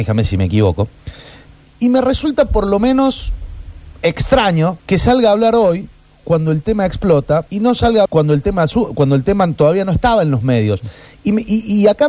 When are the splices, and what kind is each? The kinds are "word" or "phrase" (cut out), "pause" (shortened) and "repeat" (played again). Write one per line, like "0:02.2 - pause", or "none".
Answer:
0:01.6 - word
0:04.8 - pause
0:07.5 - pause
0:08.1 - phrase

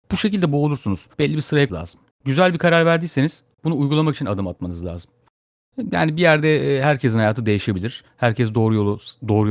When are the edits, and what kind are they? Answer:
0:01.1 - pause
0:01.7 - word
0:02.1 - pause

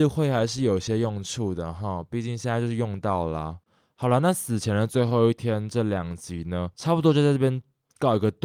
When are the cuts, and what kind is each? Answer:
0:06.7 - pause

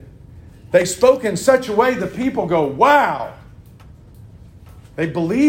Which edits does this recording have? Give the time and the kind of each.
none

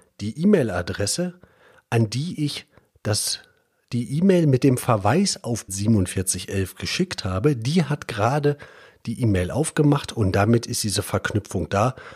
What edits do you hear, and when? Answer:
0:05.7 - word

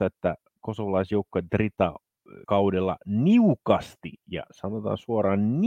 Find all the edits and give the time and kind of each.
0:02.4 - word

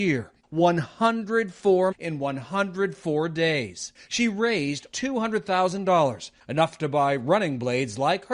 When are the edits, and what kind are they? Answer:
0:01.9 - word
0:04.9 - word

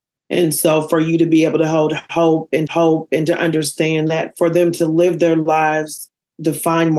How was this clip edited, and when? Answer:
0:02.7 - repeat

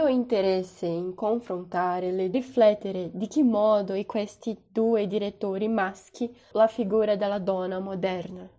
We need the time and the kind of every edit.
0:02.3 - phrase
0:06.5 - phrase

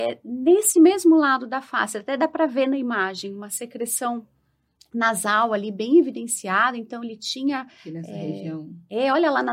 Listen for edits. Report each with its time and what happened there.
none

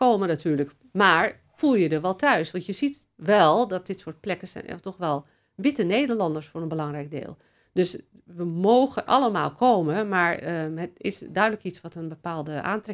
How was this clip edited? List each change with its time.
0:09.1 - word

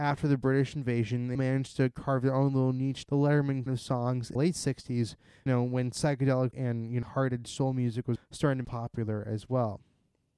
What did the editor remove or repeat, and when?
0:01.4 - word
0:03.1 - word
0:03.7 - word
0:04.4 - word
0:05.5 - word
0:06.5 - word
0:07.0 - word
0:08.2 - word
0:08.6 - word

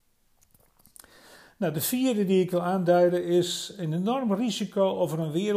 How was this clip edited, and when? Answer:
none

